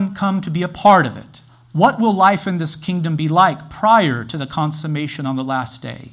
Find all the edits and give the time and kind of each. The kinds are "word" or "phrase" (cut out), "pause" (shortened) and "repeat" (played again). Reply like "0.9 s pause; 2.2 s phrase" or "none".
1.5 s pause